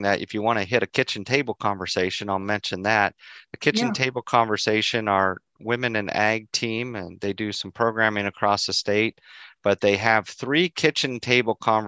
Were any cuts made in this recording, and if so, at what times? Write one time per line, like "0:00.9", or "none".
none